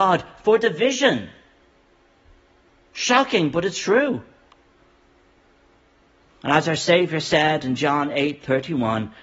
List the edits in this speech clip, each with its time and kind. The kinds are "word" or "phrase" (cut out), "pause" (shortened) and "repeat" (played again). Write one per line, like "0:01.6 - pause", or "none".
none